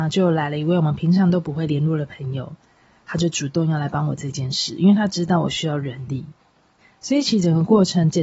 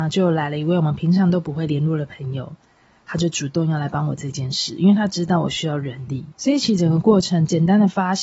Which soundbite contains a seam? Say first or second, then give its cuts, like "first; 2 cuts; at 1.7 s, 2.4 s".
second; 1 cut; at 6.3 s